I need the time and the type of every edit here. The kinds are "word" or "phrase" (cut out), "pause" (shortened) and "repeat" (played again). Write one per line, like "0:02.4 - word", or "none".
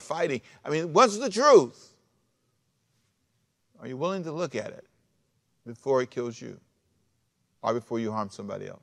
none